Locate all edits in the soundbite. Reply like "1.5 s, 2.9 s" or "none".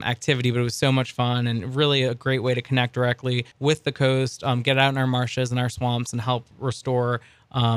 3.5 s